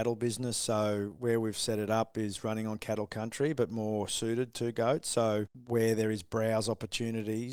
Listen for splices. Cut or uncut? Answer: uncut